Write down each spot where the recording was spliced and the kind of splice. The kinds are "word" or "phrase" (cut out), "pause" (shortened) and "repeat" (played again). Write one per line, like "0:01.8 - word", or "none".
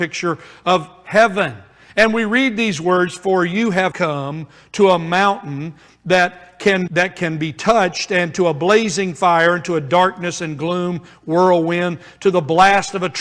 0:03.9 - word
0:06.9 - word